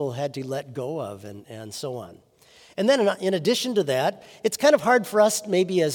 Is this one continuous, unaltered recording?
yes; 0 cuts

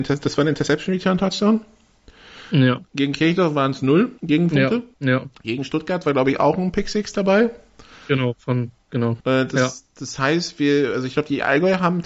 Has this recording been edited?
yes; 3 cuts; at 4.2 s, 4.9 s, 9.2 s

